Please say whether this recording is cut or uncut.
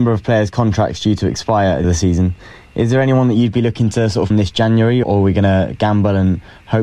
cut